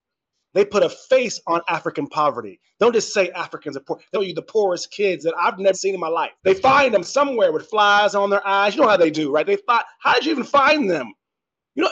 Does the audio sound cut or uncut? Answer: cut